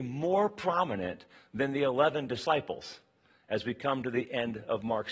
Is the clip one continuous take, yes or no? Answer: yes